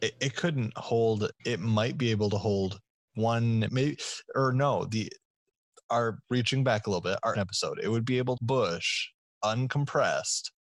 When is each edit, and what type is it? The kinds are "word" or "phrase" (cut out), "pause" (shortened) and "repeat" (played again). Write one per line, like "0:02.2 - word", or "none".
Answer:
0:01.4 - word
0:03.7 - word
0:06.2 - word
0:07.3 - word
0:08.4 - phrase